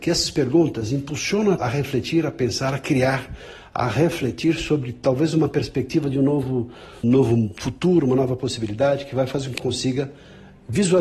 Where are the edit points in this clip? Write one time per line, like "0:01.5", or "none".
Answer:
0:01.6
0:07.0
0:09.6